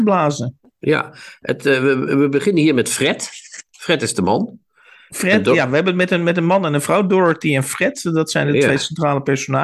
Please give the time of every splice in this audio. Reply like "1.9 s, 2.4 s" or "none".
none